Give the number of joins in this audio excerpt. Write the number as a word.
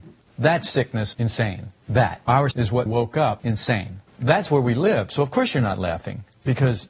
four